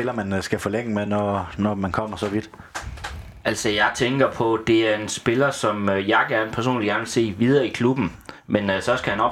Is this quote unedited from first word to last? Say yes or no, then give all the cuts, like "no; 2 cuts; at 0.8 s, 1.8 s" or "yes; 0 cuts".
yes; 0 cuts